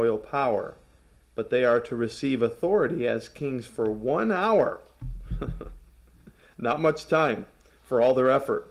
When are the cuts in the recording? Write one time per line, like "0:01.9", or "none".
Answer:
none